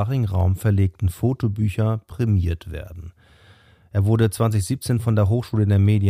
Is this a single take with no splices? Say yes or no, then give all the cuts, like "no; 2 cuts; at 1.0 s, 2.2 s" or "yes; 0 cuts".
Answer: yes; 0 cuts